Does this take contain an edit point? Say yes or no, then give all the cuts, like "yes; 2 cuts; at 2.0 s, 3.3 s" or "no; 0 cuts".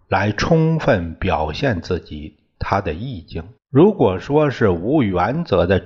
yes; 1 cut; at 3.6 s